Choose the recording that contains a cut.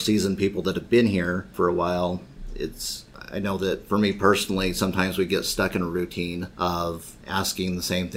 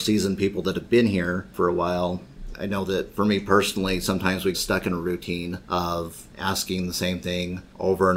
second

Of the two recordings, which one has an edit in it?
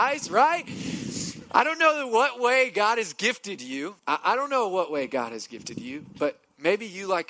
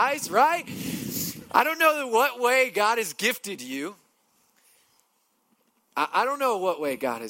first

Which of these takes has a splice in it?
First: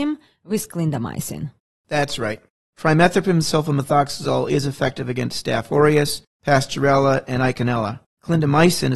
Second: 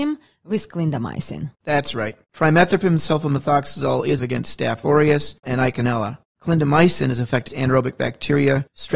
second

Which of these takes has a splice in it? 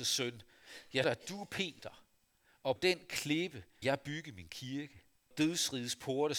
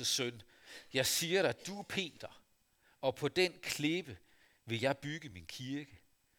first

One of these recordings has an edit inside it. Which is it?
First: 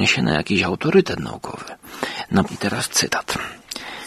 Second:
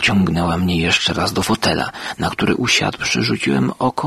first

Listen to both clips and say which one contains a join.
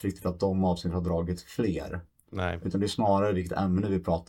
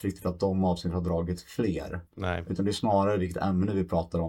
second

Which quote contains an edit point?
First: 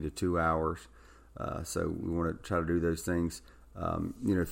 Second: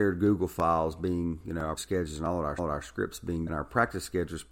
second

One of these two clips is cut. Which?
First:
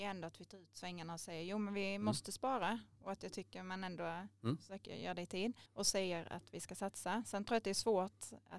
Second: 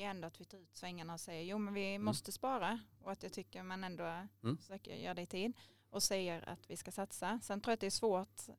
first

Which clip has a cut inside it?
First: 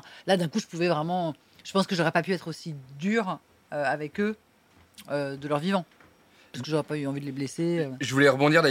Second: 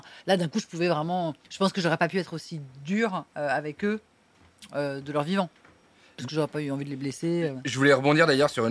second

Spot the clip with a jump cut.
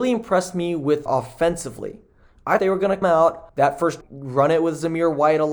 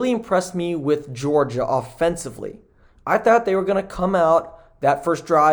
first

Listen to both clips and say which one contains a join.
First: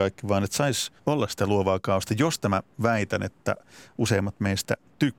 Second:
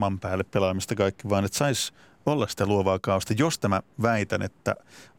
first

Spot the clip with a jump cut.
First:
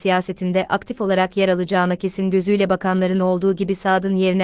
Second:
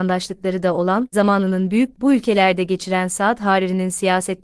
second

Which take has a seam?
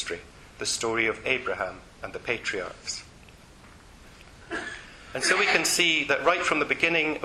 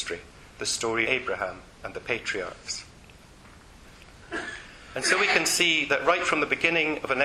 second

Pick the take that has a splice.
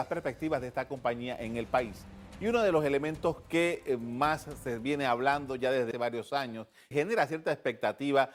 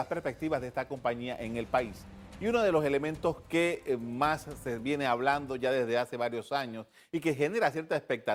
first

